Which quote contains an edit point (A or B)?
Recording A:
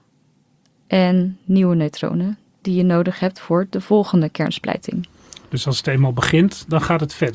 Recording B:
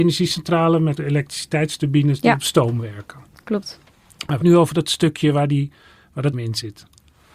B